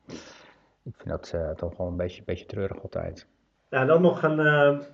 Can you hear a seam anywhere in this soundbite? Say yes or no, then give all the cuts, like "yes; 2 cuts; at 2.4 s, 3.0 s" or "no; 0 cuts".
no; 0 cuts